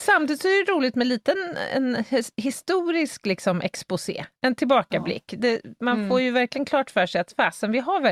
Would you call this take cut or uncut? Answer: uncut